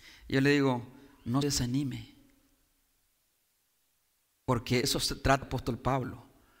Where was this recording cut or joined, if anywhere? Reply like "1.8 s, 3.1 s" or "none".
1.4 s, 4.8 s, 5.4 s